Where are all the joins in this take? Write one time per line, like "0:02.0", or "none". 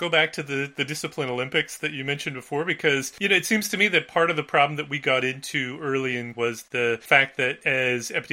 0:06.3